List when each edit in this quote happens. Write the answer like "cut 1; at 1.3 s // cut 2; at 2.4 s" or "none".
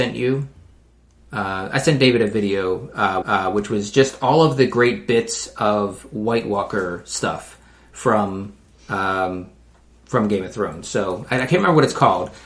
cut 1; at 3.2 s